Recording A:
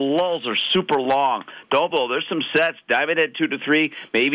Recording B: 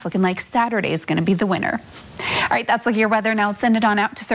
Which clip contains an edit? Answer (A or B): A